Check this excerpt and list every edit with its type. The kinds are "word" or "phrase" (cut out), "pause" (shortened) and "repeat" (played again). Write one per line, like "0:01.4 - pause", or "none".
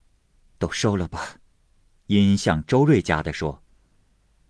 0:01.6 - pause